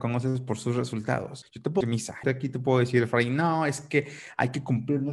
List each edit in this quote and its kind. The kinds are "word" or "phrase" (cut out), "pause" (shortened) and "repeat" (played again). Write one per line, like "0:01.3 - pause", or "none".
0:01.8 - word
0:02.2 - word